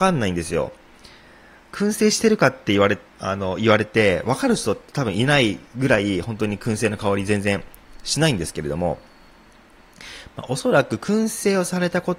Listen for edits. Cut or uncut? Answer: cut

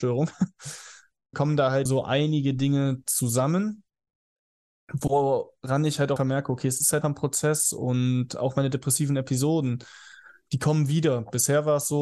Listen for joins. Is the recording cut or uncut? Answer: cut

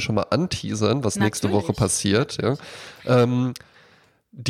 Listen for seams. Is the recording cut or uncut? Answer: uncut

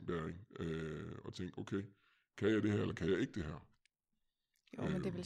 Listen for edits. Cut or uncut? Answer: uncut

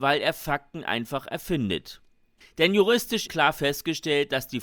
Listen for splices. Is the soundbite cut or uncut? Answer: cut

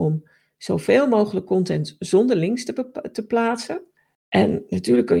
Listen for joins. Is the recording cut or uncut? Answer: uncut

